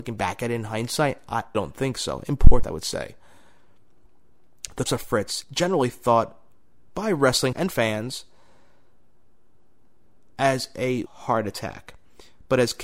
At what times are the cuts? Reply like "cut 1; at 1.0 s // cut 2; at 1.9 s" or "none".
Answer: cut 1; at 1.5 s // cut 2; at 2.6 s // cut 3; at 4.9 s // cut 4; at 5.4 s // cut 5; at 6.9 s // cut 6; at 7.5 s // cut 7; at 11.1 s